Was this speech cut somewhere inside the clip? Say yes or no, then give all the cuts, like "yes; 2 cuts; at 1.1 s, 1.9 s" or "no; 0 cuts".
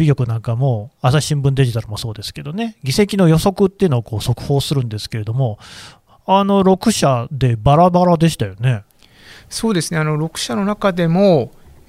no; 0 cuts